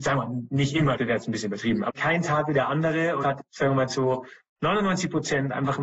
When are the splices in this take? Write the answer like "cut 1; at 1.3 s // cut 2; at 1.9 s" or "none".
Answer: cut 1; at 1.0 s // cut 2; at 1.9 s // cut 3; at 3.2 s